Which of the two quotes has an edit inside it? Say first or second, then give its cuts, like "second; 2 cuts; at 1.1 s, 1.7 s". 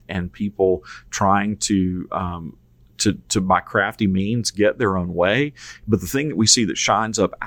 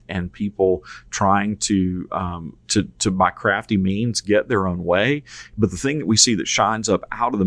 second; 1 cut; at 2.6 s